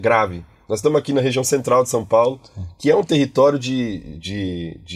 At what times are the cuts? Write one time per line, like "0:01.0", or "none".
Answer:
none

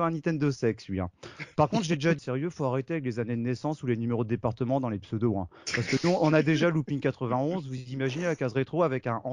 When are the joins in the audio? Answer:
0:02.2

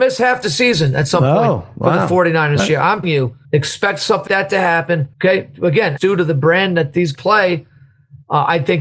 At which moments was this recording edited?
0:02.6
0:03.0
0:03.4
0:04.3
0:05.1
0:06.0
0:07.1

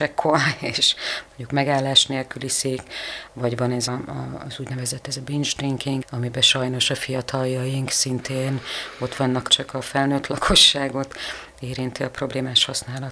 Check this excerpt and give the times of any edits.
0:03.9
0:09.5

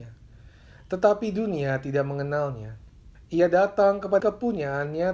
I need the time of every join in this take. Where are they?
0:03.1
0:04.2

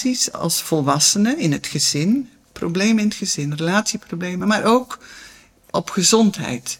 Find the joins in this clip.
none

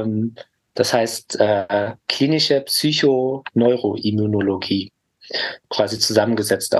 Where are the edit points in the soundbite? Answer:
0:05.6

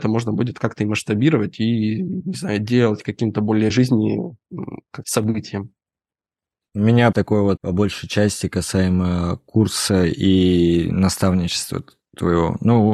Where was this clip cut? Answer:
0:03.7
0:05.0
0:07.1
0:07.6

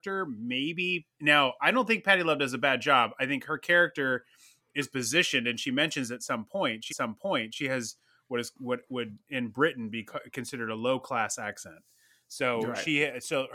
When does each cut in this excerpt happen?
0:01.1
0:06.9

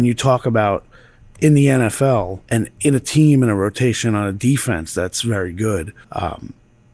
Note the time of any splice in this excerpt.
0:02.4
0:06.0

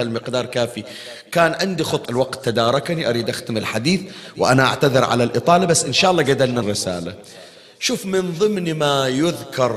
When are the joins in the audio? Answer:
0:02.1
0:06.6

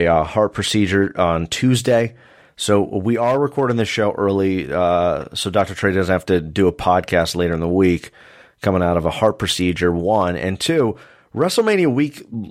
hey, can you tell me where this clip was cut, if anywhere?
none

